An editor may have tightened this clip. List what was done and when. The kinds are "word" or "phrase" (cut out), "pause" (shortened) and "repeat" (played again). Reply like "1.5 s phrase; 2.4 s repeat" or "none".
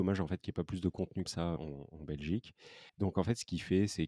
1.3 s word; 1.6 s word; 2.9 s pause